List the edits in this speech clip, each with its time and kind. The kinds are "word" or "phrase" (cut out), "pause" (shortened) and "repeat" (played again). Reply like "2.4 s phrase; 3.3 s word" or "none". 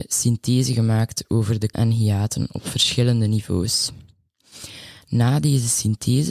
1.7 s word

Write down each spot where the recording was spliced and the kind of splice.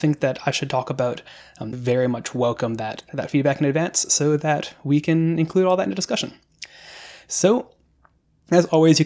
1.7 s word

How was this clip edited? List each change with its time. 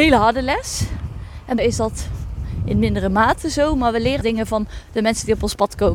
1.6 s word; 4.2 s word

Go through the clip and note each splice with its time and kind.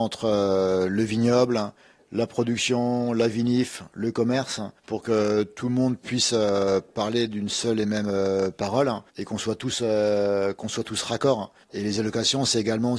4.8 s pause; 9.1 s pause; 11.6 s pause

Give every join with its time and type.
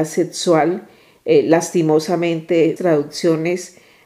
2.8 s word

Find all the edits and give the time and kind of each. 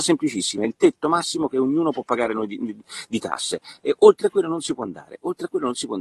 none

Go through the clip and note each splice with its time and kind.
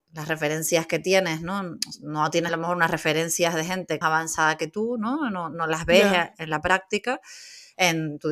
2.5 s word; 4.0 s phrase

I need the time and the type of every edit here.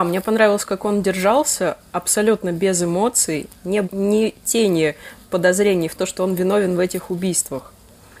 3.8 s word; 6.0 s word

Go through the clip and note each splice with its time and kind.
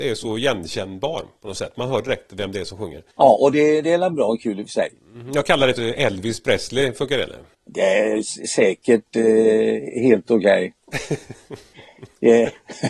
3.1 s pause; 5.8 s phrase; 7.5 s pause

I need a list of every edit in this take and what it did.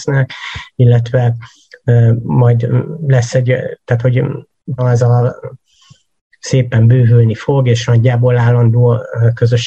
4.8 s word

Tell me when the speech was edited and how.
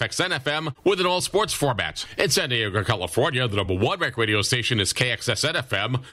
none

